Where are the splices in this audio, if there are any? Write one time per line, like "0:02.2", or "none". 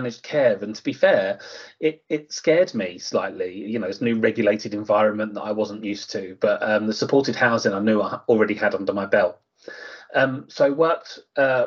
none